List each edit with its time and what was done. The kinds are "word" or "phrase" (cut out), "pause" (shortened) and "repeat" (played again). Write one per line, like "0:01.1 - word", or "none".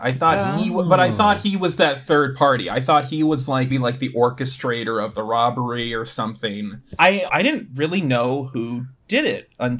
0:03.7 - word
0:07.3 - phrase